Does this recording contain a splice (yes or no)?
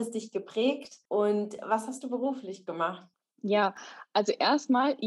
yes